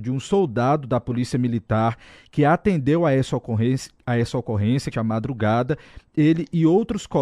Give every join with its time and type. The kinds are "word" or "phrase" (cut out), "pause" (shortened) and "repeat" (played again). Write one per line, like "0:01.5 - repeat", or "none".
0:04.9 - phrase